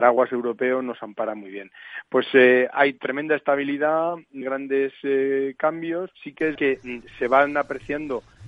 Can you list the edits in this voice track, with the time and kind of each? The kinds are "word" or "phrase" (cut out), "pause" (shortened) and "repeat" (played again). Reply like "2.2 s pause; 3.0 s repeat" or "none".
4.4 s word; 6.1 s pause; 6.6 s word